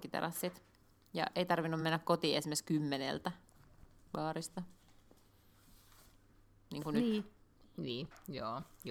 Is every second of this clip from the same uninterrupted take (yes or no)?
yes